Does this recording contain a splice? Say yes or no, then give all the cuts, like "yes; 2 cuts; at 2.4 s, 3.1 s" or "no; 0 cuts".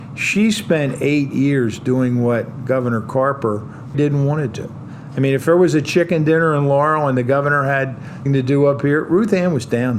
yes; 2 cuts; at 3.9 s, 8.3 s